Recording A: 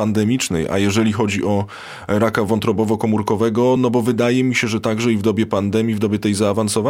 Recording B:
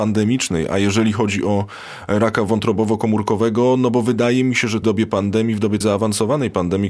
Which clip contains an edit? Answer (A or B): B